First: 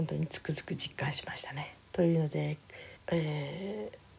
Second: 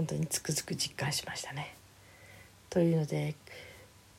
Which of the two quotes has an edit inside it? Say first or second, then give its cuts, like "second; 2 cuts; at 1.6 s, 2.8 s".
first; 2 cuts; at 1.8 s, 3.0 s